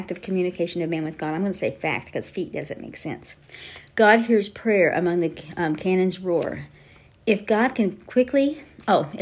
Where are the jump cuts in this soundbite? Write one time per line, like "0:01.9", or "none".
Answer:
none